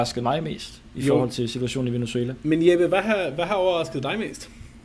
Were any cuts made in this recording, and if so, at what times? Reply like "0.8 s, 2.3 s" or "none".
none